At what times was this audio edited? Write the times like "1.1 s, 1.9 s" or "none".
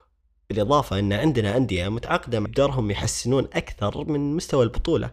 2.5 s